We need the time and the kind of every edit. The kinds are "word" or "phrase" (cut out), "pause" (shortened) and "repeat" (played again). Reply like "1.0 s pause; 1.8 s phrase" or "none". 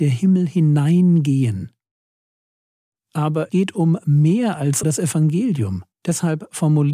3.5 s word; 4.8 s word; 5.9 s pause